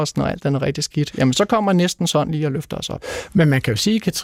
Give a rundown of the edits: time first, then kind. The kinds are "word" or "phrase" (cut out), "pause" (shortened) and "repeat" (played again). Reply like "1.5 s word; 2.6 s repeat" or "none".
none